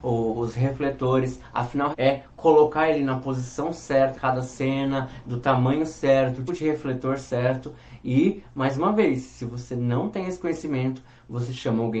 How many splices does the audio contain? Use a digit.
3